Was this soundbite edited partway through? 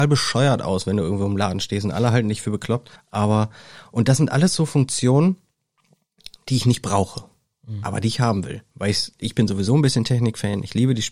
yes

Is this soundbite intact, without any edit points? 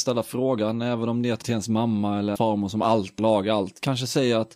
no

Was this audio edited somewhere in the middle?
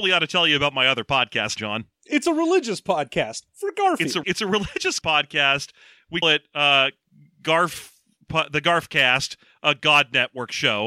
yes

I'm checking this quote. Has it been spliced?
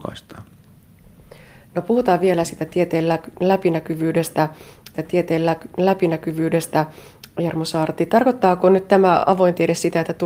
yes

